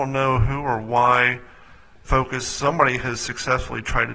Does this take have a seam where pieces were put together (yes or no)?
yes